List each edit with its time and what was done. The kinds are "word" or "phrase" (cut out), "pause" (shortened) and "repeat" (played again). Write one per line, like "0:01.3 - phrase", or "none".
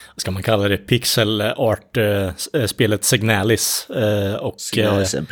none